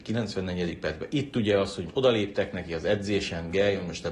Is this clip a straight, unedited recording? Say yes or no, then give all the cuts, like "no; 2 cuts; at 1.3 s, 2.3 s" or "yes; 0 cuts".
no; 1 cut; at 1.9 s